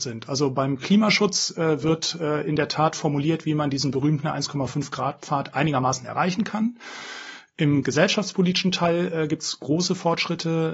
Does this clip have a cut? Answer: no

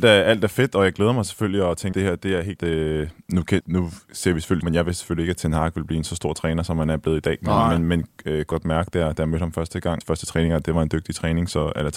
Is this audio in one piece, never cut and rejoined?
no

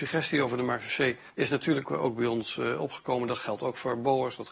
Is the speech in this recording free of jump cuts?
no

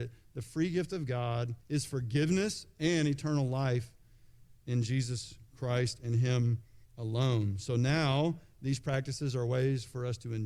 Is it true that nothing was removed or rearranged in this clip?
no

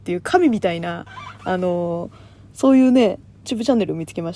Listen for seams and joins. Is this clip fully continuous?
no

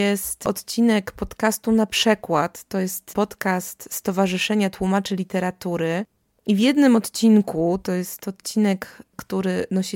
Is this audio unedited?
yes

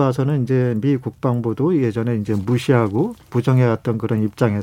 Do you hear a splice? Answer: no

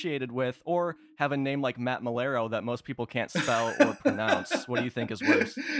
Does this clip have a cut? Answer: no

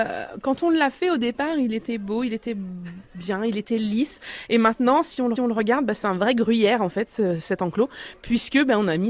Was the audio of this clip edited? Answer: yes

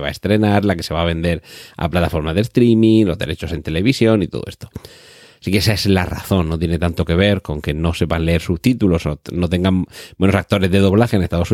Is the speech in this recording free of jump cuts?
yes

